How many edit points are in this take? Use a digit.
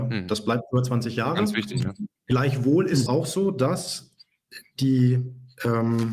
2